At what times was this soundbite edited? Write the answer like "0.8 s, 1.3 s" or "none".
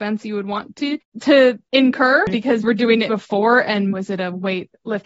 1.0 s, 2.6 s, 3.1 s, 3.9 s